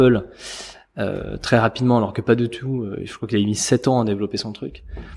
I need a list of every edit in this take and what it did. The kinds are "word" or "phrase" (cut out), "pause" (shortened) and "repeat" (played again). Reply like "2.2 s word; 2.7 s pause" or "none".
none

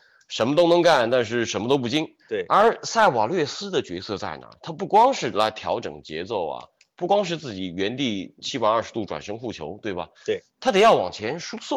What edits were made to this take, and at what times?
2.2 s pause; 10.1 s pause

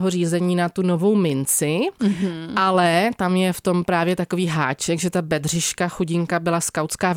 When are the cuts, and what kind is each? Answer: none

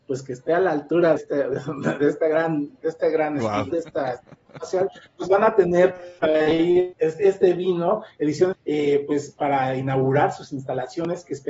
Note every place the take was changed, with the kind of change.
1.2 s word; 2.8 s word; 3.7 s word; 6.2 s word; 6.9 s word; 8.5 s word

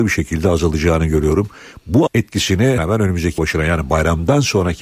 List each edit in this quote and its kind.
2.1 s word; 2.8 s word; 3.4 s word

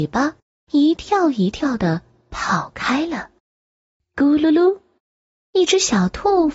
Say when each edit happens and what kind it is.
3.5 s pause

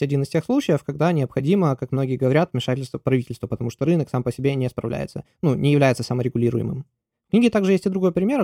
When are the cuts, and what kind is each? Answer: none

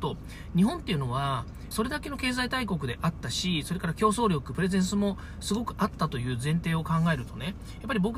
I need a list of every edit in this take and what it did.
1.7 s phrase

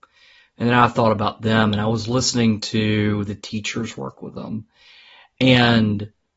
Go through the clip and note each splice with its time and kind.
none

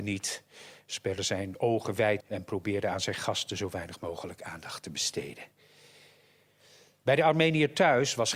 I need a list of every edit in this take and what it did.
2.2 s word

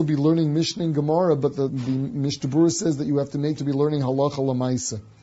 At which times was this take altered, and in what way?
1.7 s word; 3.6 s word

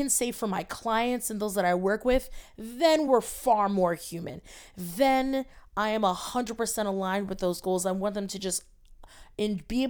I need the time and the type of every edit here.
none

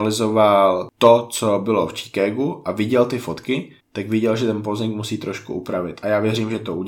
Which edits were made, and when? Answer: 3.8 s pause

